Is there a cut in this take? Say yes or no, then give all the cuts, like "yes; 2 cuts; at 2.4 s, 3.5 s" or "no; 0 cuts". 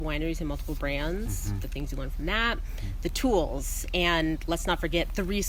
no; 0 cuts